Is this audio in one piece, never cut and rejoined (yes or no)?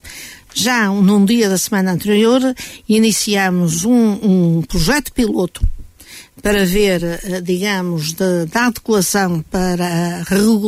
yes